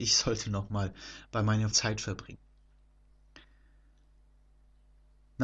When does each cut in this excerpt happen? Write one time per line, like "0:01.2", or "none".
0:01.7